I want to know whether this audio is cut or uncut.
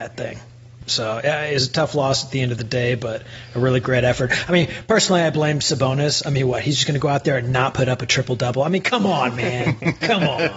uncut